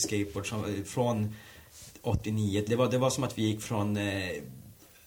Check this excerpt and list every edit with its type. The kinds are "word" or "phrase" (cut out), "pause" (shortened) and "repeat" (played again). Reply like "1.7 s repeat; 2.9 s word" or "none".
2.7 s word